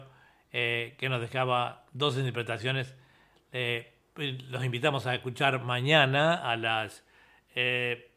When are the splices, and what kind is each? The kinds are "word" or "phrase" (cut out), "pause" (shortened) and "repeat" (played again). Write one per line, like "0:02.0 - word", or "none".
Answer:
none